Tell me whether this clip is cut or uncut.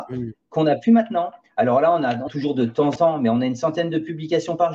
cut